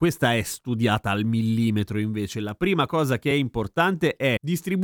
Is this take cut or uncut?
uncut